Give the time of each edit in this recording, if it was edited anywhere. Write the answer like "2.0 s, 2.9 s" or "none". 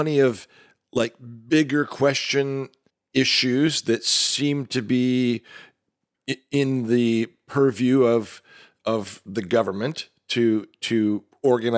2.9 s